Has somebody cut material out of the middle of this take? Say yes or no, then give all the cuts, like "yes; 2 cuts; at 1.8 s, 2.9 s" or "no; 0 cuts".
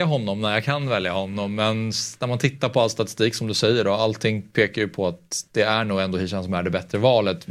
no; 0 cuts